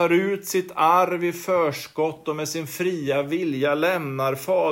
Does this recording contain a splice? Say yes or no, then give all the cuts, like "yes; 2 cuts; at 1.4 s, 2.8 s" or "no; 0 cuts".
no; 0 cuts